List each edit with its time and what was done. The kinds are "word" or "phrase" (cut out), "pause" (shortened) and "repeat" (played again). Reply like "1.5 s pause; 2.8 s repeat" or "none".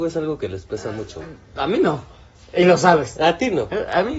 none